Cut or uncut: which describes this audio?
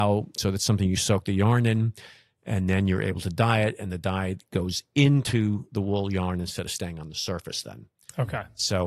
uncut